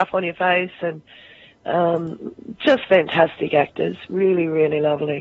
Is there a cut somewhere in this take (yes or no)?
no